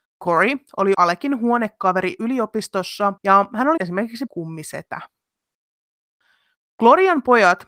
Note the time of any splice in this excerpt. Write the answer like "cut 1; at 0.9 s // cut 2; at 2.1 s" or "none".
cut 1; at 0.9 s // cut 2; at 3.2 s // cut 3; at 3.8 s // cut 4; at 4.3 s